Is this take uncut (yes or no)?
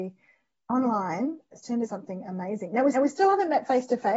no